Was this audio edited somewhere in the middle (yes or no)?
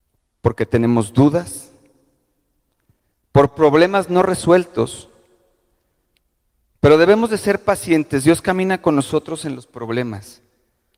no